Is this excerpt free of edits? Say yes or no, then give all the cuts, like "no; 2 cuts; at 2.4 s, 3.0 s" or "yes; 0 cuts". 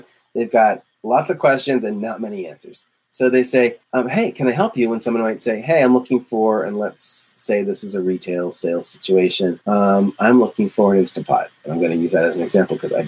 no; 2 cuts; at 3.8 s, 9.6 s